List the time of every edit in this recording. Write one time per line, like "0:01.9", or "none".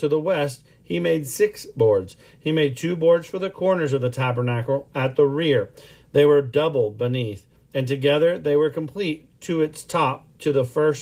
none